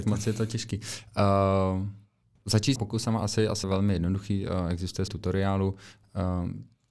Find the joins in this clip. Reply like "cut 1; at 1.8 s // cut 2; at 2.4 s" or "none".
cut 1; at 2.8 s // cut 2; at 3.6 s // cut 3; at 5.1 s